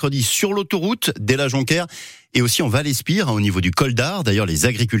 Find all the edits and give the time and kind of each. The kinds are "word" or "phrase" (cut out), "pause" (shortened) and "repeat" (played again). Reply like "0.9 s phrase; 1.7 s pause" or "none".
none